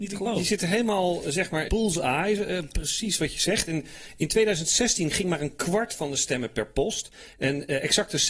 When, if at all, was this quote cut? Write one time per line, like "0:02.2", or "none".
0:01.7